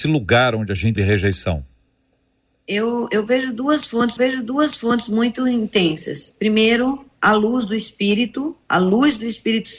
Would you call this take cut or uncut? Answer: cut